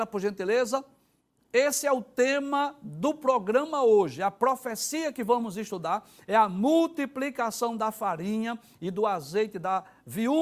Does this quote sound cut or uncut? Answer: uncut